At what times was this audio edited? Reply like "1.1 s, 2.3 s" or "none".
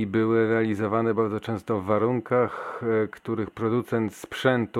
none